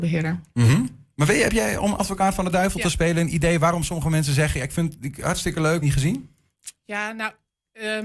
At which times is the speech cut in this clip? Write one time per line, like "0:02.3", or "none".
0:05.8